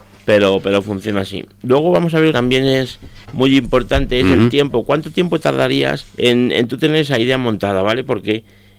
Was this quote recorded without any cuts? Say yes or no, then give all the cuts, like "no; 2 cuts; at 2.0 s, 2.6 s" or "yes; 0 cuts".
no; 3 cuts; at 2.3 s, 3.2 s, 6.1 s